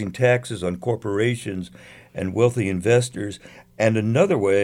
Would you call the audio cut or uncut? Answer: uncut